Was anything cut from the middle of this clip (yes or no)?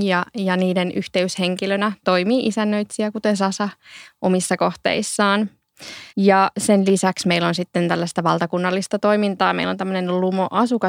yes